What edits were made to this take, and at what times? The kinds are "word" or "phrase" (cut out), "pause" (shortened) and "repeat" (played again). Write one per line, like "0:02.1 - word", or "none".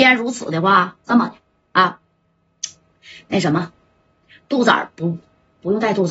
none